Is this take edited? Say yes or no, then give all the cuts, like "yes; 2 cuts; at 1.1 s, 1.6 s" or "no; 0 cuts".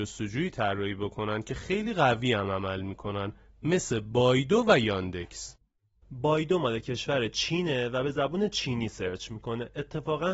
no; 0 cuts